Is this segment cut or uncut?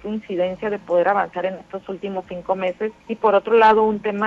cut